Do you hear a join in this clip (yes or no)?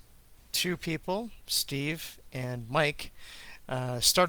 no